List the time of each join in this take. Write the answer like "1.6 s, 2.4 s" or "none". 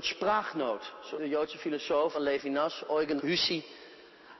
1.2 s, 2.1 s, 3.2 s